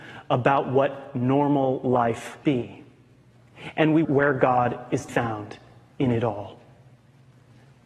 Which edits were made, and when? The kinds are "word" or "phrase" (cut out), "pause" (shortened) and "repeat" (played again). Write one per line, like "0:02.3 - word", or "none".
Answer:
0:02.4 - word
0:04.0 - word
0:05.1 - word